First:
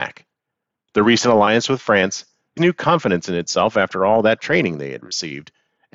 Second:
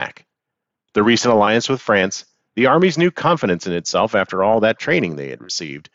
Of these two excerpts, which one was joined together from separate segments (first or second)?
first